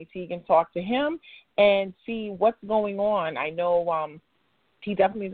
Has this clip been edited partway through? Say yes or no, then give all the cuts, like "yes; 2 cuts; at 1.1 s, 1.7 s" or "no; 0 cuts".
no; 0 cuts